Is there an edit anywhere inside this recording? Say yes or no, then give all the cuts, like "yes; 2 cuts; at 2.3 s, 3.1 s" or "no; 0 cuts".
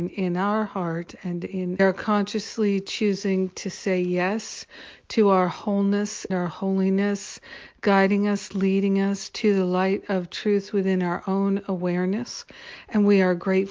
yes; 2 cuts; at 1.8 s, 6.3 s